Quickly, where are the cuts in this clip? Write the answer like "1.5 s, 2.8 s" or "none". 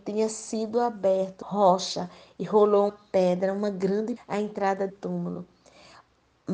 1.4 s, 2.9 s, 4.2 s, 4.9 s